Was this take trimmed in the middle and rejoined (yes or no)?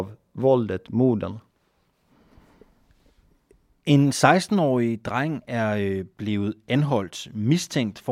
no